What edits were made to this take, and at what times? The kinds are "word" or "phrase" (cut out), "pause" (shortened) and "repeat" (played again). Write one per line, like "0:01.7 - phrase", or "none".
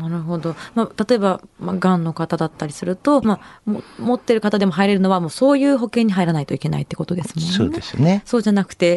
0:03.2 - phrase